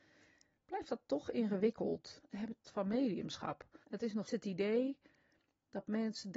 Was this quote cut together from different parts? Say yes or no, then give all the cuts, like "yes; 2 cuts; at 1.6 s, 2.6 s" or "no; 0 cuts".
yes; 4 cuts; at 2.3 s, 2.6 s, 3.8 s, 4.2 s